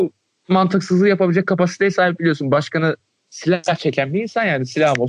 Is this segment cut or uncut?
uncut